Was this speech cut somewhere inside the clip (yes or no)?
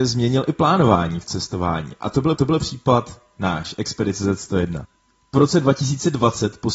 yes